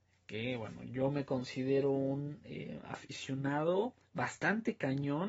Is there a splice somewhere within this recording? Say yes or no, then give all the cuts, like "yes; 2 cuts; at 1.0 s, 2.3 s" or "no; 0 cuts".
yes; 1 cut; at 4.0 s